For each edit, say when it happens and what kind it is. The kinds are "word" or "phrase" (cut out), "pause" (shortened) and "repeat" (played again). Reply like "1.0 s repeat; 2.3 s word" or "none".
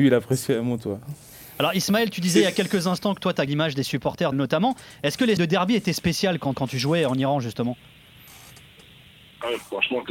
3.5 s word; 4.3 s word; 5.4 s word; 6.5 s word